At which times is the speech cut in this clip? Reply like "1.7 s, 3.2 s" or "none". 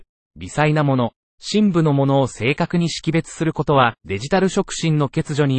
4.0 s